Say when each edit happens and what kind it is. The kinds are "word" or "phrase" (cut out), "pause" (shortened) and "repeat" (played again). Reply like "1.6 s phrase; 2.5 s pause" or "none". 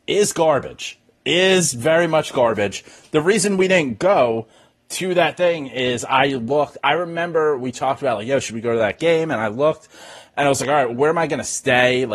none

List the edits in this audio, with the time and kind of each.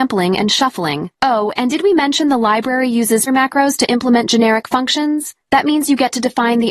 1.1 s pause; 3.3 s word; 5.4 s pause

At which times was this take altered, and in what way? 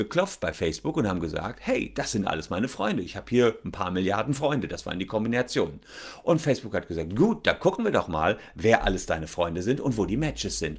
none

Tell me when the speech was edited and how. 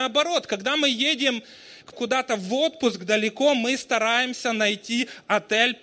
1.9 s word

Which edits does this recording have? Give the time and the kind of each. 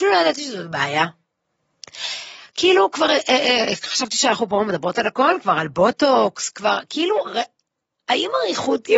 none

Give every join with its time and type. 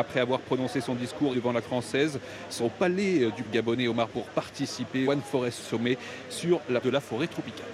1.3 s word; 1.6 s word; 2.6 s word; 3.4 s word; 4.1 s word; 5.0 s word; 5.6 s word; 6.8 s word

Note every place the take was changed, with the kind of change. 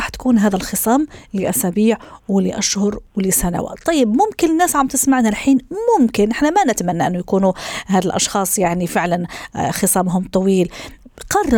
none

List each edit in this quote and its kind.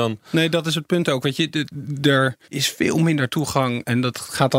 2.4 s pause

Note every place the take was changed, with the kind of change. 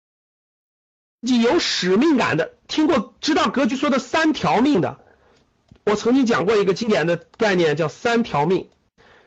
none

